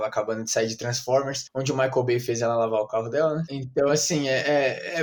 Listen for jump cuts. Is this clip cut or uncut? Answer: uncut